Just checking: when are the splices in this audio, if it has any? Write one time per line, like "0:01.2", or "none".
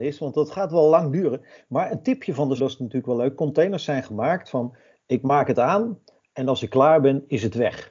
0:02.6